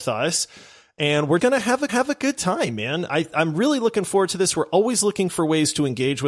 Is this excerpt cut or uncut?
cut